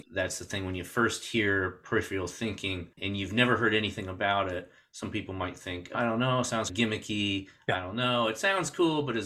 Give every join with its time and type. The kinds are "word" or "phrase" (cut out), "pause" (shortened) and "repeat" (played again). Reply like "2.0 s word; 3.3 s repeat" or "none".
2.9 s pause